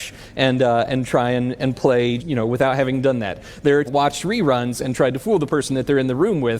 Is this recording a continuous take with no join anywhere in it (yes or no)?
no